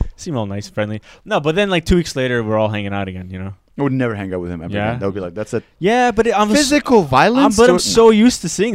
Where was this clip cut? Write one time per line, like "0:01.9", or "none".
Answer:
none